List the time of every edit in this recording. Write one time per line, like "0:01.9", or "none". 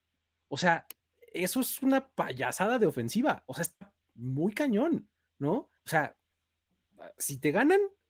0:01.0
0:04.0
0:05.8